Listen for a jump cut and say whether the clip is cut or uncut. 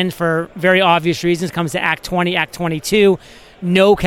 cut